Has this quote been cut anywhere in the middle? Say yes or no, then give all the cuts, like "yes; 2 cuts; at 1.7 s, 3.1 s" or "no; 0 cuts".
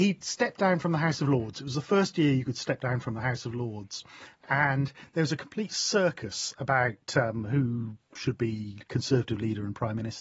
no; 0 cuts